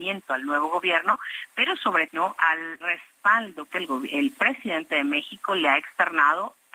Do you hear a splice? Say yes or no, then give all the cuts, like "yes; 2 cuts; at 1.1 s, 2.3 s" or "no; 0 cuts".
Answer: yes; 3 cuts; at 2.1 s, 2.8 s, 3.7 s